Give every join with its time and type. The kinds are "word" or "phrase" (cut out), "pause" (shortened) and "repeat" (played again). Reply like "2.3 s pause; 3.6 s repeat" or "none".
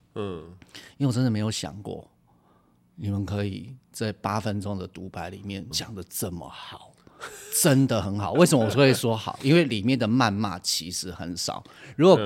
5.7 s word